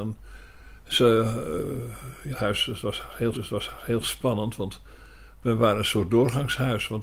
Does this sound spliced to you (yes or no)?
yes